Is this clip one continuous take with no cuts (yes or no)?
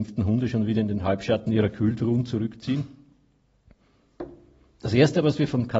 yes